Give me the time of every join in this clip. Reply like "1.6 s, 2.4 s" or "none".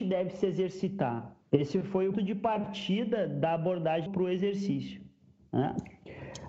1.4 s, 2.1 s, 4.1 s